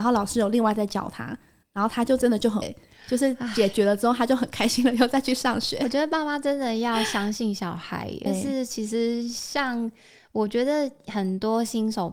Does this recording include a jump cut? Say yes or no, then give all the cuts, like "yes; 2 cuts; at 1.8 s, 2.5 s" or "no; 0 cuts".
yes; 2 cuts; at 2.6 s, 8.3 s